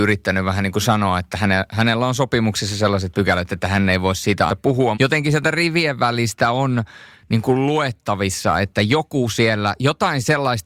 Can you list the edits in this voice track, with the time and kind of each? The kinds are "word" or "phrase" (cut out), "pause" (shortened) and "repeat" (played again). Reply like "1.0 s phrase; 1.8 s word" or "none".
4.5 s word; 4.9 s word